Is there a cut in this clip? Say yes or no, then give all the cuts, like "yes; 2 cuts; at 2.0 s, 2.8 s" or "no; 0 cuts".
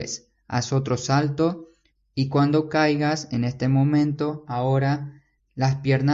no; 0 cuts